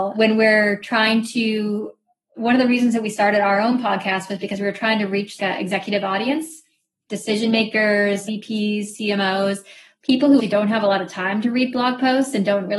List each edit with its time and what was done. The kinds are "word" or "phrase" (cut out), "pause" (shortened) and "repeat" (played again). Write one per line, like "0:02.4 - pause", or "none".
0:05.4 - word
0:10.4 - word